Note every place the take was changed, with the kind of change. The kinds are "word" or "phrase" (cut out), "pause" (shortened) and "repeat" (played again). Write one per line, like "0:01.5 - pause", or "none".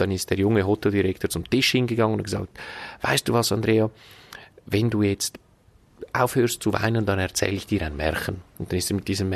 none

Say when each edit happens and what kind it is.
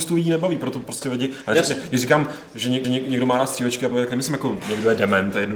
0:02.8 - repeat
0:03.9 - phrase

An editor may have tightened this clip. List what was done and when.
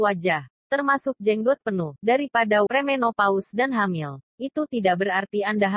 0:02.7 - word
0:04.3 - pause

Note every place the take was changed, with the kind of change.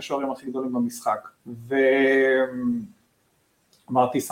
0:01.4 - pause

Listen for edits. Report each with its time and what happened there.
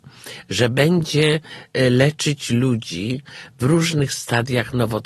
none

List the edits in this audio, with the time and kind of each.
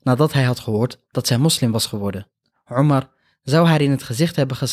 none

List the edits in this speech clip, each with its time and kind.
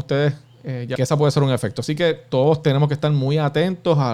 0:01.0 - phrase

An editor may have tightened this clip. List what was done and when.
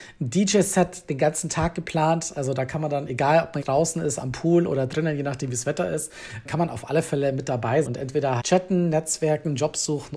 0:03.6 - word
0:06.4 - word
0:07.8 - word
0:08.4 - word

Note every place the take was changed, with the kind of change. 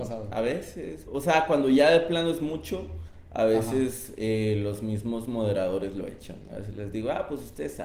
0:01.1 - word

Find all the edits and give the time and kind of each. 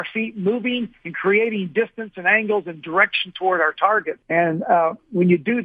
0:04.2 - pause

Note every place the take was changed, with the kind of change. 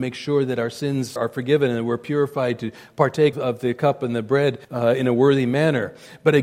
0:01.2 - word
0:03.3 - word
0:04.6 - pause

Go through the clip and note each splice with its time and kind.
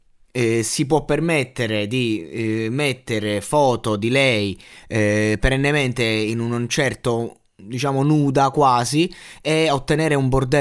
none

